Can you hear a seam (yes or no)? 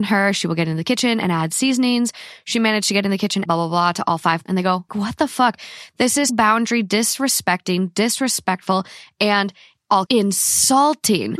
yes